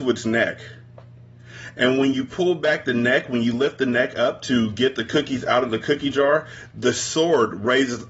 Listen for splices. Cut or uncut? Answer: uncut